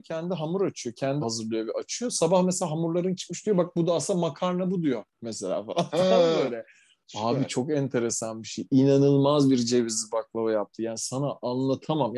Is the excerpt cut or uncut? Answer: cut